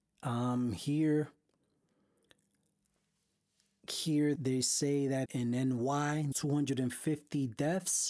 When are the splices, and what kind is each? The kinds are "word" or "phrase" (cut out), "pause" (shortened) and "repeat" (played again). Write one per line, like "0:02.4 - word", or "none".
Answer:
0:04.3 - word
0:05.2 - word
0:06.3 - word